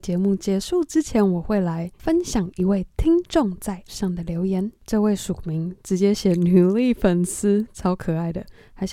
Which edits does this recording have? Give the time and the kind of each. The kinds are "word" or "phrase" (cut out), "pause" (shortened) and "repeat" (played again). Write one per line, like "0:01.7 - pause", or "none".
0:03.9 - word